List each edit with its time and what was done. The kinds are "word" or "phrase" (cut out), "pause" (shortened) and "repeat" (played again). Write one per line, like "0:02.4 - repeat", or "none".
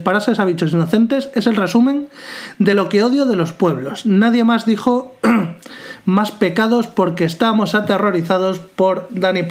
none